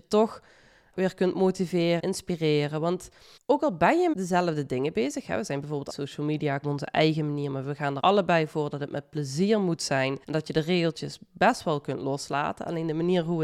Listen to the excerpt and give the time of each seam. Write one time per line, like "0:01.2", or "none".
0:00.9
0:02.0
0:03.4
0:04.1
0:05.9
0:06.6
0:08.0
0:10.2